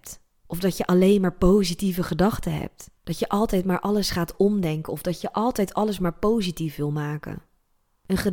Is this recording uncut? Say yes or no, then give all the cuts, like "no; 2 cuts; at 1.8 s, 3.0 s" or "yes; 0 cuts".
no; 1 cut; at 3.0 s